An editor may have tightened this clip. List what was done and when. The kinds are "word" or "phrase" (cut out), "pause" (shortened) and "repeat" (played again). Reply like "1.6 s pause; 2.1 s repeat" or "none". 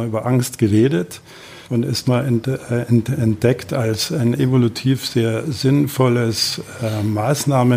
1.6 s pause; 2.0 s word